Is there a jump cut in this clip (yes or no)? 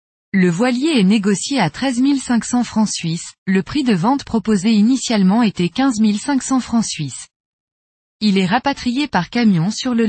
yes